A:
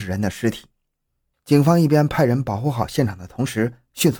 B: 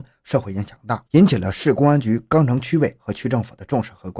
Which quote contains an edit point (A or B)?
B